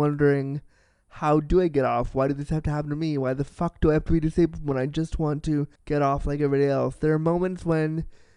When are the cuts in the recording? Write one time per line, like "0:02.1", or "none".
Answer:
0:05.7